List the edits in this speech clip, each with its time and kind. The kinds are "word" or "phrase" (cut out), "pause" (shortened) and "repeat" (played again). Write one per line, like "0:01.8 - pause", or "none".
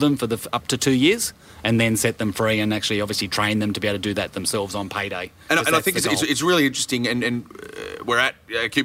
none